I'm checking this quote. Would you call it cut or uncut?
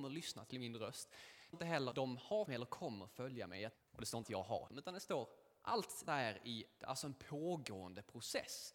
cut